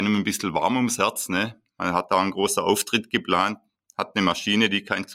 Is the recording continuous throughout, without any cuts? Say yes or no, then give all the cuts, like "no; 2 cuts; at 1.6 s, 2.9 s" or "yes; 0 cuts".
yes; 0 cuts